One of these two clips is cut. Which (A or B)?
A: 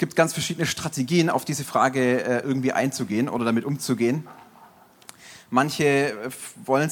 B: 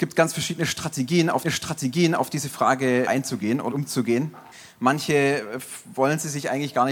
B